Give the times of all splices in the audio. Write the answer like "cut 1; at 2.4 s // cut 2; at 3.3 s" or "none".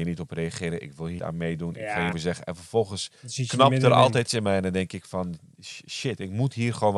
cut 1; at 1.2 s // cut 2; at 2.1 s // cut 3; at 3.2 s // cut 4; at 4.3 s